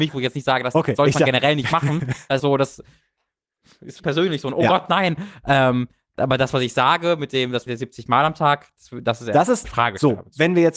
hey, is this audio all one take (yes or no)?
no